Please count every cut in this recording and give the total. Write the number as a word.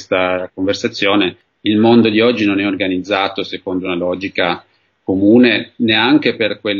zero